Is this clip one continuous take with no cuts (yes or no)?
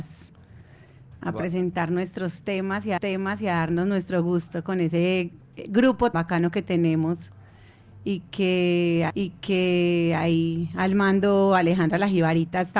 no